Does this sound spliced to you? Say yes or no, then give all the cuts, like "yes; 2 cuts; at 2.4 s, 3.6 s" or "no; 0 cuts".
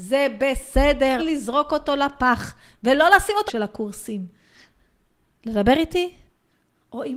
yes; 2 cuts; at 1.2 s, 3.5 s